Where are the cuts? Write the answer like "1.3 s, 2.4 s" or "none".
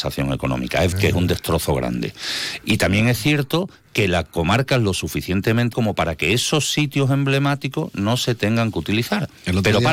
0.9 s, 5.7 s